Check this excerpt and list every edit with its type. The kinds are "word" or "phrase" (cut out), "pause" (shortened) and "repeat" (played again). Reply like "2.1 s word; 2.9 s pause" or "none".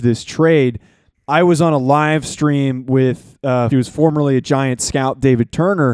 3.7 s phrase